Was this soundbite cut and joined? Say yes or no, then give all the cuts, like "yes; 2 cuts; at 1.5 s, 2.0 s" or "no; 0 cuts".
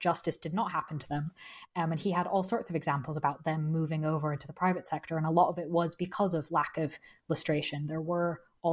no; 0 cuts